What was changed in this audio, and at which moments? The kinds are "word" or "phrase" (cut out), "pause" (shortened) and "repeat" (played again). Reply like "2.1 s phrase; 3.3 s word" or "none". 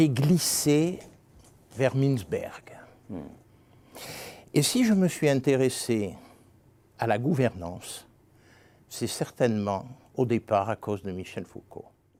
none